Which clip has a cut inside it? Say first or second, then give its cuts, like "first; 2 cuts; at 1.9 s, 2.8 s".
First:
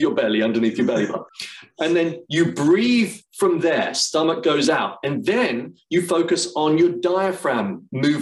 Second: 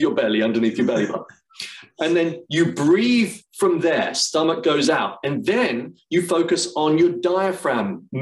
first; 1 cut; at 1.3 s